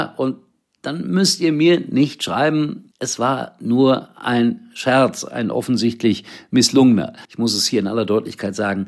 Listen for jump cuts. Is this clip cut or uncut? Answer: cut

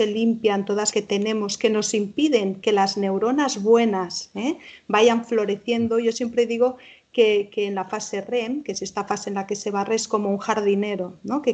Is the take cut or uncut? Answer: cut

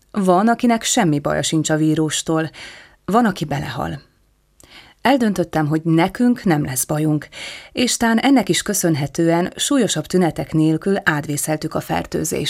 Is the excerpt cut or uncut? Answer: uncut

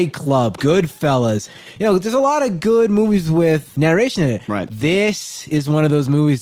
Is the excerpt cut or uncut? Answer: uncut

